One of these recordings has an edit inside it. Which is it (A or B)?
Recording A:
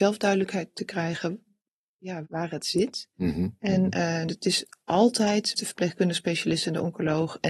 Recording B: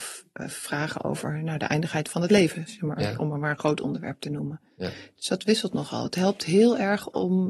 A